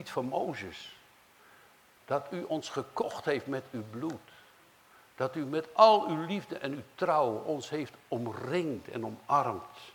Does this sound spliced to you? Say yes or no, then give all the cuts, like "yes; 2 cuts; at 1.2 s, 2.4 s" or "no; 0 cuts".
no; 0 cuts